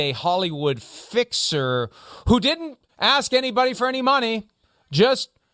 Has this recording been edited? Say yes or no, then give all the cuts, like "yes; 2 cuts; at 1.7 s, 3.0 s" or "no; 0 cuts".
yes; 1 cut; at 2.9 s